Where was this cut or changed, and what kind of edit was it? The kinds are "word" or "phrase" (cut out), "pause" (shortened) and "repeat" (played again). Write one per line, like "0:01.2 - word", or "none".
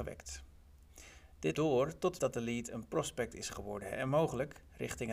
0:01.5 - word
0:02.2 - word